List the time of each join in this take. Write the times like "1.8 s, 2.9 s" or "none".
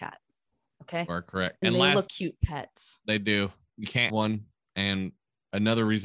1.6 s, 2.1 s, 3.7 s, 4.1 s